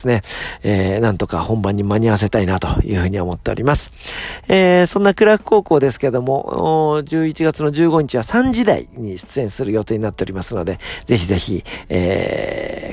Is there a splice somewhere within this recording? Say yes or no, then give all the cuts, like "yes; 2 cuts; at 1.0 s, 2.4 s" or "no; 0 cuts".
no; 0 cuts